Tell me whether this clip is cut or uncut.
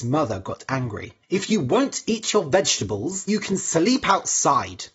cut